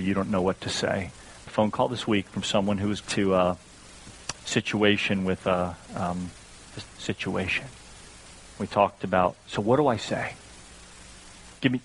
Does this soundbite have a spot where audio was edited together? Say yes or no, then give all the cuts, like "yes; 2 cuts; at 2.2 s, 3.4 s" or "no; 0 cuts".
yes; 4 cuts; at 1.5 s, 3.0 s, 4.3 s, 6.8 s